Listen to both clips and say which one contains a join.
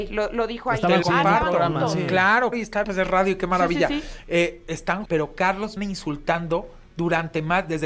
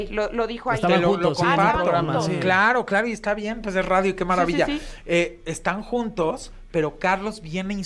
first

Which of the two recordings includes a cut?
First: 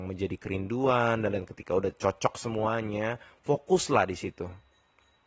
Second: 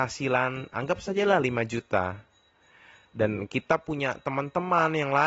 first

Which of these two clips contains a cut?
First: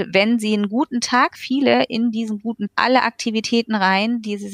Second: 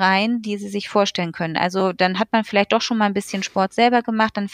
first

